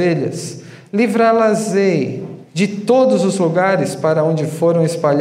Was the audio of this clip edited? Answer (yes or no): yes